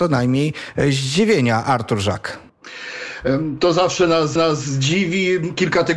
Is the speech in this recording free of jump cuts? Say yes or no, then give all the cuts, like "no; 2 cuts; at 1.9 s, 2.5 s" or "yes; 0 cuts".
no; 1 cut; at 4.4 s